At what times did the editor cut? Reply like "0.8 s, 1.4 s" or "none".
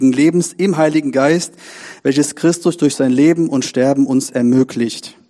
none